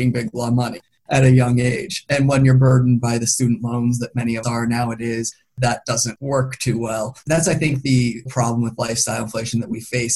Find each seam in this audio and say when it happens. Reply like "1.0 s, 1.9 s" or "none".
4.4 s, 6.2 s, 8.3 s